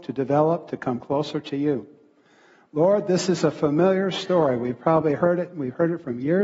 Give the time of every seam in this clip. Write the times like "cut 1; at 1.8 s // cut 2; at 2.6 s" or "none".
none